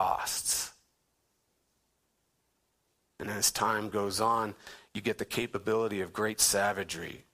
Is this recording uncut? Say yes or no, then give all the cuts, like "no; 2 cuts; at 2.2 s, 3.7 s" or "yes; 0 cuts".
yes; 0 cuts